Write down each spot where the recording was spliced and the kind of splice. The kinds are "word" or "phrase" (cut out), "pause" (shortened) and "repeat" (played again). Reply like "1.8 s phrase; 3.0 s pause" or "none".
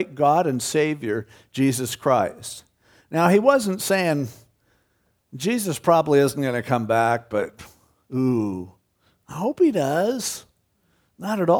none